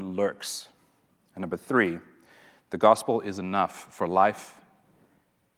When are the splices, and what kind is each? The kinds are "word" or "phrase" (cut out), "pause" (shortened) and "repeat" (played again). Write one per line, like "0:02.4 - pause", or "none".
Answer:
none